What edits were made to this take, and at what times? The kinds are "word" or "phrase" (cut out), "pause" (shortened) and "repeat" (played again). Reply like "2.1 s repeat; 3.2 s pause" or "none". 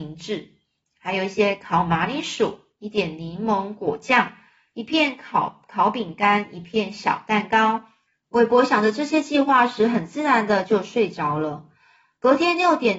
8.1 s pause